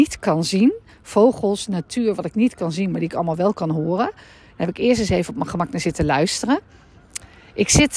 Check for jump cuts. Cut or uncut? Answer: uncut